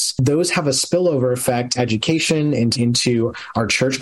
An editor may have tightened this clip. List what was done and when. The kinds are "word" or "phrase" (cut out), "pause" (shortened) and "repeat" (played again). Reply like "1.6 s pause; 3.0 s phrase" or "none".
1.8 s word; 2.8 s word